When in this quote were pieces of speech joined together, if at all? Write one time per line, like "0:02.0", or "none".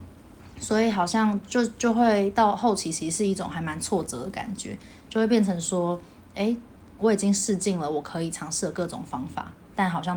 0:07.0